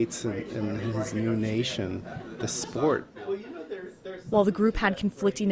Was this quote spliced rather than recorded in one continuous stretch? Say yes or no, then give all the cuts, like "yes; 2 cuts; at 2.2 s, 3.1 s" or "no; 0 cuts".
no; 0 cuts